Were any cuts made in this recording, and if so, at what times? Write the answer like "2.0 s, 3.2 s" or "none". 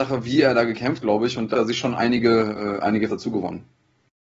1.0 s, 1.5 s, 3.1 s